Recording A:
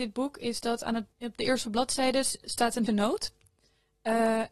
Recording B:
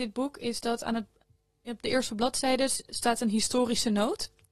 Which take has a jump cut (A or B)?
A